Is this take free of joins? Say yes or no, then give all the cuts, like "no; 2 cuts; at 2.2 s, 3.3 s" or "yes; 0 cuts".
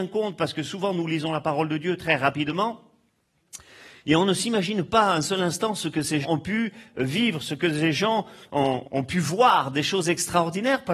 no; 2 cuts; at 6.2 s, 8.8 s